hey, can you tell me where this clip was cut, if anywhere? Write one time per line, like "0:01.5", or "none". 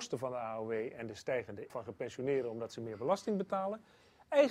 0:01.7